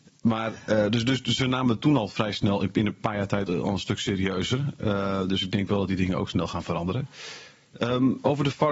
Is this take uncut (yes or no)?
no